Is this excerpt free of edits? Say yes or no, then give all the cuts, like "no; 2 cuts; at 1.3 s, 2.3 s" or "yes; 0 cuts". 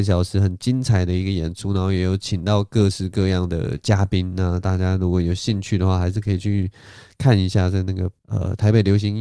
no; 1 cut; at 8.2 s